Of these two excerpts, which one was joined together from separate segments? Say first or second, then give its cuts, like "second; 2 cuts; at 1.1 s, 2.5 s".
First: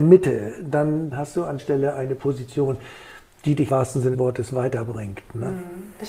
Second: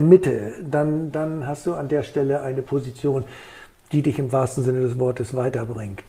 first; 4 cuts; at 1.1 s, 1.6 s, 3.7 s, 4.1 s